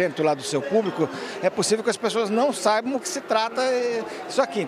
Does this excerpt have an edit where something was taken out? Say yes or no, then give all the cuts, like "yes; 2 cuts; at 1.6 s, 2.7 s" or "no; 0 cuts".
yes; 1 cut; at 3.0 s